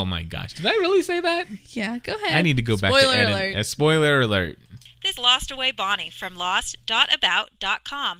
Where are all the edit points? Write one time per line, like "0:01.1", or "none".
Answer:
0:05.2